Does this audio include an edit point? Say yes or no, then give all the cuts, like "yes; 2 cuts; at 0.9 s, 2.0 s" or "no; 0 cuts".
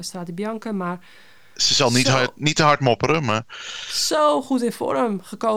no; 0 cuts